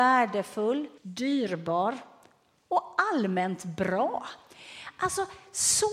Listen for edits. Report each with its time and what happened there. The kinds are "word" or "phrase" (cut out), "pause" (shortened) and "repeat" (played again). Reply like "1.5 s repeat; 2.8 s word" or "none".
1.0 s pause